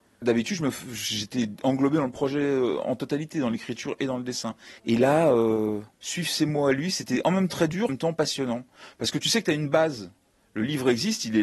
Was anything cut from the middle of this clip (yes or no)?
yes